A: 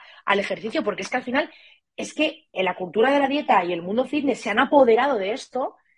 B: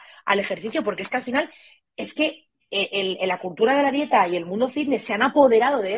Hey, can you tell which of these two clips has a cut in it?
A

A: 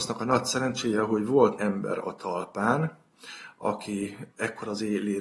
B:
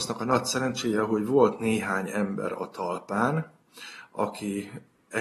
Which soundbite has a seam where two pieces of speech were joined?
A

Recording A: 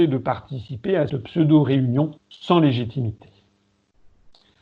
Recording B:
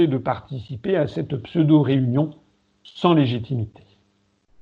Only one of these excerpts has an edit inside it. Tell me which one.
A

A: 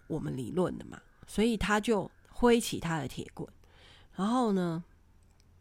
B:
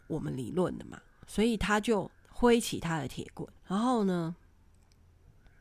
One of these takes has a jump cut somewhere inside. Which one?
B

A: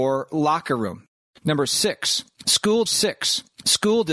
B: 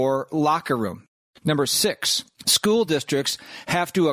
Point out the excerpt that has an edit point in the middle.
A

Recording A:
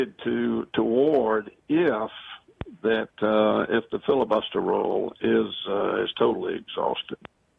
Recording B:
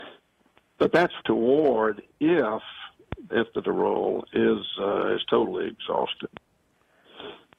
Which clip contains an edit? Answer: B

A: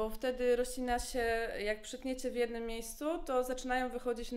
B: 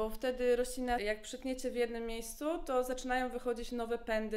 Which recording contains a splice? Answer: B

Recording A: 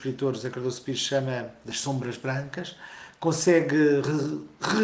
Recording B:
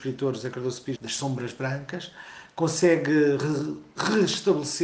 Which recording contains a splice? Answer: B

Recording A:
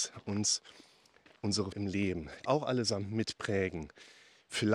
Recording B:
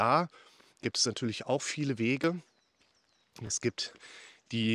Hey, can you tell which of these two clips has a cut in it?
A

